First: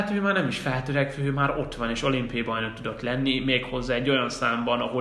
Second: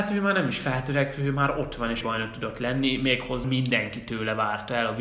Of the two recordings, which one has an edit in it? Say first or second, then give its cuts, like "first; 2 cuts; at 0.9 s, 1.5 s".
second; 2 cuts; at 2.0 s, 3.4 s